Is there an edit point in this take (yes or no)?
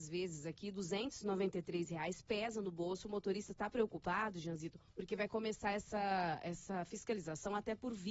yes